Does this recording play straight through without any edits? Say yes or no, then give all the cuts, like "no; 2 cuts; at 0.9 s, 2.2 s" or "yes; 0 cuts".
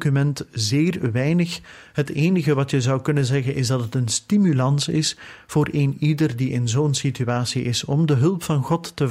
yes; 0 cuts